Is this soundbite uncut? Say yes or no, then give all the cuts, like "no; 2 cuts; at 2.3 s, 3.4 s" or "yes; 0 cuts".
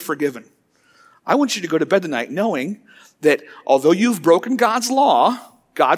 yes; 0 cuts